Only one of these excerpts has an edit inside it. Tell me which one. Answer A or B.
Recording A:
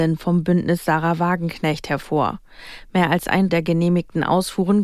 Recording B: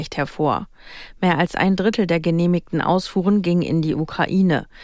A